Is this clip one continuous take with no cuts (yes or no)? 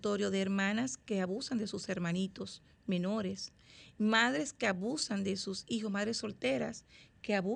yes